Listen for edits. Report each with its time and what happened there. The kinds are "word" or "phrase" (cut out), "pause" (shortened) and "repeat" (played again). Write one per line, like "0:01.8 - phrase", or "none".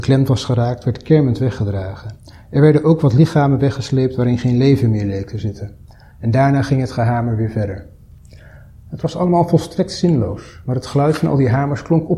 none